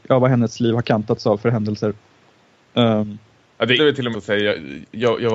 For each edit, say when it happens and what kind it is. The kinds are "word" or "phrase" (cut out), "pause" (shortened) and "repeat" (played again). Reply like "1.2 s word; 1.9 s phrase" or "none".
3.8 s word; 4.1 s word